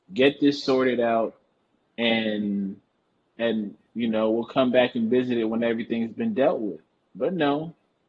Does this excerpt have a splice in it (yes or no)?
no